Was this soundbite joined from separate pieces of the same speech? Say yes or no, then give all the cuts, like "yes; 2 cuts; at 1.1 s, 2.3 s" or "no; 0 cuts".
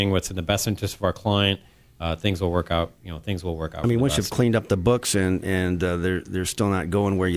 no; 0 cuts